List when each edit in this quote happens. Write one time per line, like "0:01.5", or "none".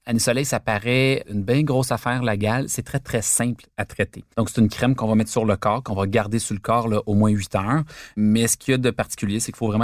0:04.3